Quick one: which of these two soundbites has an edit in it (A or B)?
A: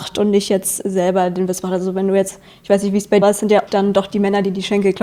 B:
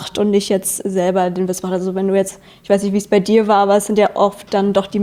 A